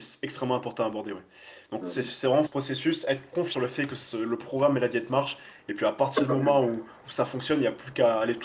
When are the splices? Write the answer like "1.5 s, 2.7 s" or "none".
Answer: 1.8 s, 2.5 s, 3.5 s